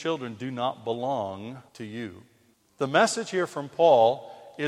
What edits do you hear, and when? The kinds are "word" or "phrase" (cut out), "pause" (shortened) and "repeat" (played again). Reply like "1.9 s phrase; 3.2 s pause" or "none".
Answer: 1.7 s pause; 2.5 s pause